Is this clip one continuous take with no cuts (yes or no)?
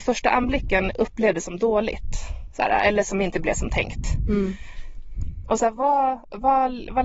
yes